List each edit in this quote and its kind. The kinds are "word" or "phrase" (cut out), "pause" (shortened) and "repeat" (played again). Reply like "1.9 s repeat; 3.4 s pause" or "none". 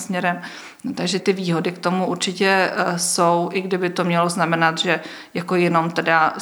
1.2 s word

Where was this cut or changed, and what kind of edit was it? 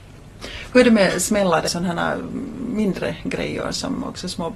1.7 s word

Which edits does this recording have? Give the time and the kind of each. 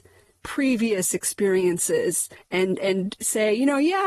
none

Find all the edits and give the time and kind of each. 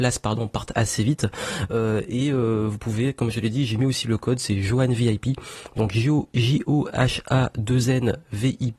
none

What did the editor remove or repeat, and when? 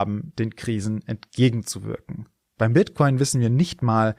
2.4 s pause

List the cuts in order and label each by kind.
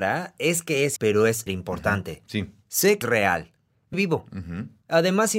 1.0 s word; 1.5 s word; 3.0 s word; 3.9 s word

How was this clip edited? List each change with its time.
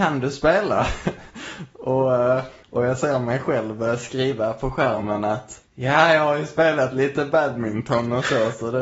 2.6 s pause; 5.6 s pause

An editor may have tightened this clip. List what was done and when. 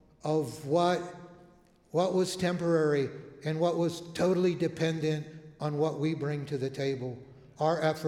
none

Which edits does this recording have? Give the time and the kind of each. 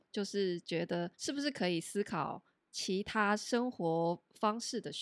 1.1 s pause

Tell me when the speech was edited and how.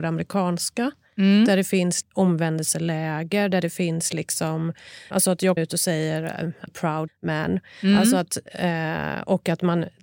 2.0 s word; 5.1 s word; 5.6 s word; 6.7 s word; 7.1 s word

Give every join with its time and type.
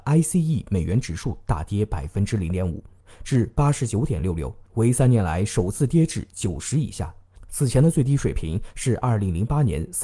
none

